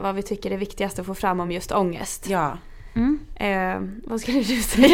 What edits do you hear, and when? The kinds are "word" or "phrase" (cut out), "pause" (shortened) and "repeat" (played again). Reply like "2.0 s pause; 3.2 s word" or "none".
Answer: none